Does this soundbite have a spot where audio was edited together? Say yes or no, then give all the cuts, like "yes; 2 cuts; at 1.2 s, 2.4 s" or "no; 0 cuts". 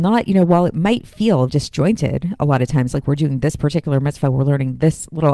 yes; 1 cut; at 1.5 s